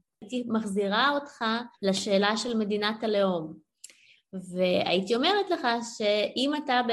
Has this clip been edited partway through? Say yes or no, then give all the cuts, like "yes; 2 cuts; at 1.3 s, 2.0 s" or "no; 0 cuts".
yes; 1 cut; at 1.7 s